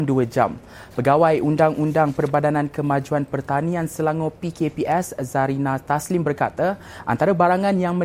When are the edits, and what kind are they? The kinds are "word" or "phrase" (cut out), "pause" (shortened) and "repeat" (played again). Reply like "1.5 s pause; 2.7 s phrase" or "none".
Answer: none